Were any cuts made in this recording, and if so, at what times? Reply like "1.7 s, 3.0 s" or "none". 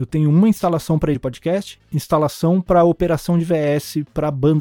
1.1 s, 1.8 s